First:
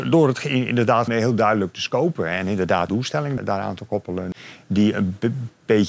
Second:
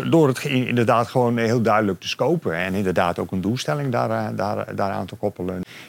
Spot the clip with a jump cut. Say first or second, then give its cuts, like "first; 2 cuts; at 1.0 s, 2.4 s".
first; 3 cuts; at 1.1 s, 2.9 s, 3.4 s